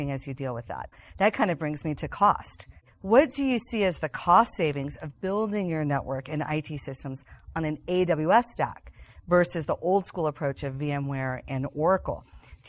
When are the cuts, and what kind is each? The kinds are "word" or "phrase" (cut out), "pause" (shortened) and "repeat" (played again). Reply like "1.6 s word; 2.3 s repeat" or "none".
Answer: none